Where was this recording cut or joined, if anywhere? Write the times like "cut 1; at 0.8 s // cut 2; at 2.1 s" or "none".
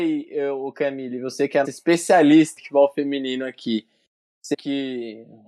cut 1; at 1.6 s // cut 2; at 2.6 s // cut 3; at 4.5 s